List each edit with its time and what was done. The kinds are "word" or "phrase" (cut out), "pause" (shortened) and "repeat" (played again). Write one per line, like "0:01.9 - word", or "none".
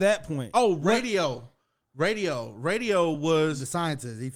none